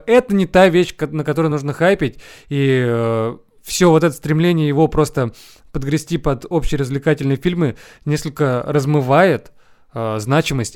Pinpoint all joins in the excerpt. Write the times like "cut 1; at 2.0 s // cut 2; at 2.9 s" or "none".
none